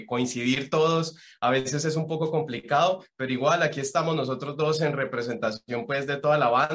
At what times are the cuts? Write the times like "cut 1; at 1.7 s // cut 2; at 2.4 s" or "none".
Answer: none